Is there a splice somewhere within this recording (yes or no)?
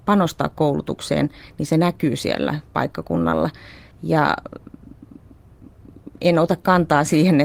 yes